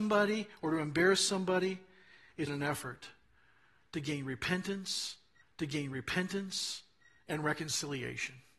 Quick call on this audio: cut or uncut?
cut